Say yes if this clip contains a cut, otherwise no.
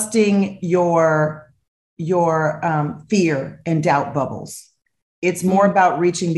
no